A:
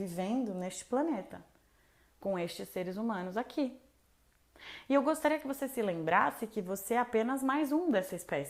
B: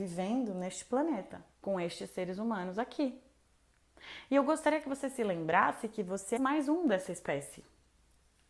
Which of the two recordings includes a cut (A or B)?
B